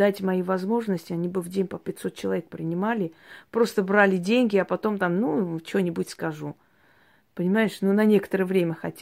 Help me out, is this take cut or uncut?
uncut